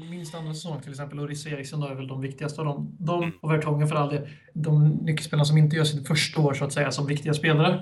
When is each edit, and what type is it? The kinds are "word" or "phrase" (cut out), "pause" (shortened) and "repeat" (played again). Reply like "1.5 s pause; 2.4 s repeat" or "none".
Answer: 3.4 s pause

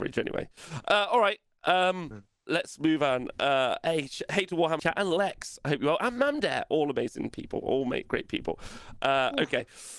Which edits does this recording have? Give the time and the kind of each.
2.5 s word; 4.8 s phrase

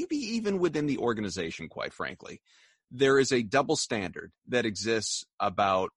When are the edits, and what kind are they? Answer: none

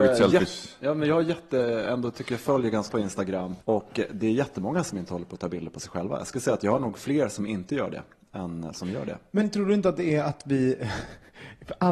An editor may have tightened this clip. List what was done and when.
2.9 s word; 3.6 s pause

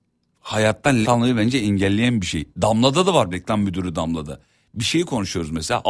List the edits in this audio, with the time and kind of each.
1.0 s word; 3.3 s word

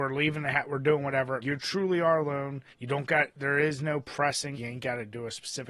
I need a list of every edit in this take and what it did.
1.4 s word; 2.7 s pause; 4.5 s word

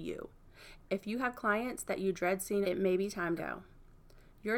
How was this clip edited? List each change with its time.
2.6 s phrase; 3.4 s phrase

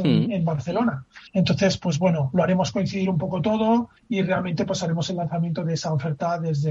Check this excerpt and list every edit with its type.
1.3 s pause; 4.0 s pause

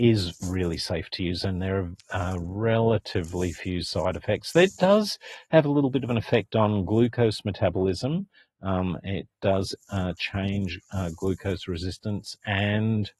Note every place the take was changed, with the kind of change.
none

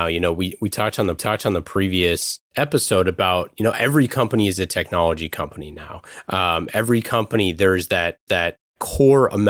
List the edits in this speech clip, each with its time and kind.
1.2 s repeat; 8.3 s repeat

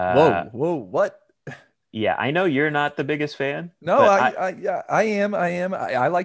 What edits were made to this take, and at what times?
none

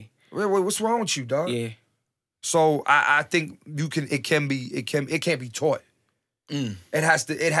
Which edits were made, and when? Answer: none

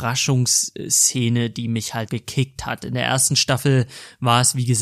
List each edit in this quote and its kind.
2.1 s word

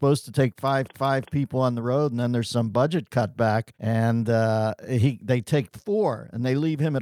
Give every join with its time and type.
0.9 s repeat; 3.7 s pause

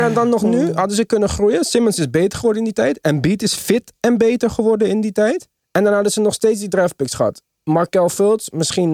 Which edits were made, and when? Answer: 5.6 s pause

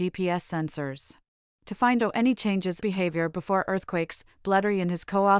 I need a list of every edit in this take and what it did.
1.3 s pause; 2.0 s phrase; 2.8 s phrase

